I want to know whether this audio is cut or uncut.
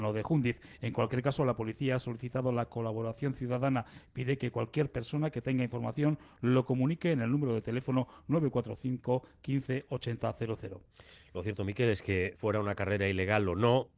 cut